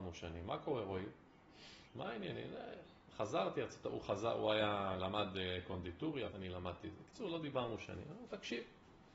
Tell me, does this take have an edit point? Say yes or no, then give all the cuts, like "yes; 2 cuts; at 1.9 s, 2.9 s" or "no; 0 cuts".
yes; 2 cuts; at 1.8 s, 6.3 s